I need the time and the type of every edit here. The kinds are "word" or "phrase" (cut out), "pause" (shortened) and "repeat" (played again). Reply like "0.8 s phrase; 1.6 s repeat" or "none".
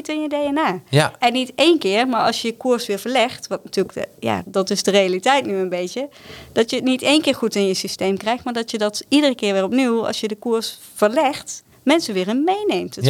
3.9 s word; 4.4 s word; 11.7 s pause